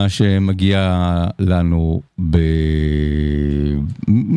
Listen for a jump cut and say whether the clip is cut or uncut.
uncut